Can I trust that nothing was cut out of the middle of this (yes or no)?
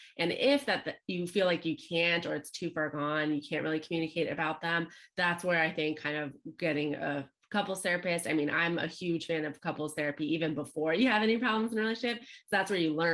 yes